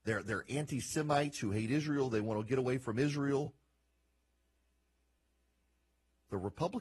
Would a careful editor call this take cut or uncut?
uncut